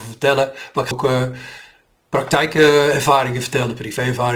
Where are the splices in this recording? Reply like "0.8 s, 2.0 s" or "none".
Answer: 0.9 s